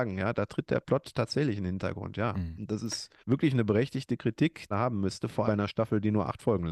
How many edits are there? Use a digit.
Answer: 3